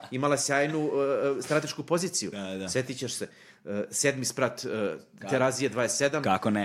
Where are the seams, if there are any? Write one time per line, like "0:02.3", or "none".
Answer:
none